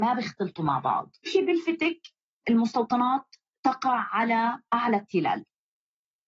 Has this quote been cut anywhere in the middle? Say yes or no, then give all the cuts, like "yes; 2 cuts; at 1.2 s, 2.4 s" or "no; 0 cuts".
yes; 2 cuts; at 1.3 s, 2.4 s